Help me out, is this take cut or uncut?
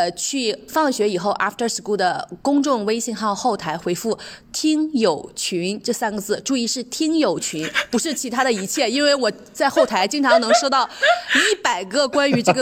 uncut